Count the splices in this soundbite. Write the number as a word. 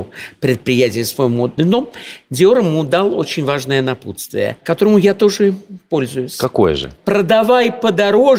one